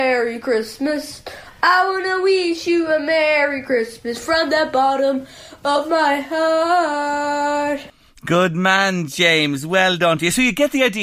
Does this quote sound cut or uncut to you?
uncut